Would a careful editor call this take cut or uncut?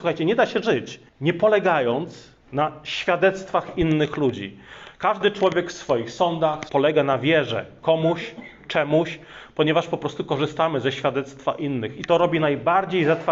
cut